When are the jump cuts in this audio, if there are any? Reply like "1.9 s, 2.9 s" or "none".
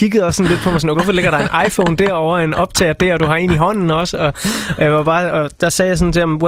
0.9 s